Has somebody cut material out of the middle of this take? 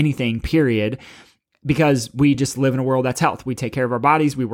no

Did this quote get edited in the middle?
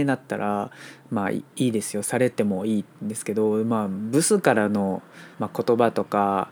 yes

